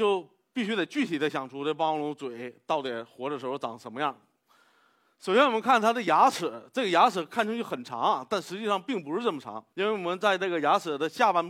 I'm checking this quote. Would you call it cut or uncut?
cut